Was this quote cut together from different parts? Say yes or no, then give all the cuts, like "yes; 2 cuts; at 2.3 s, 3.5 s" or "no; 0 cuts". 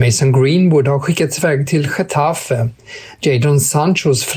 no; 0 cuts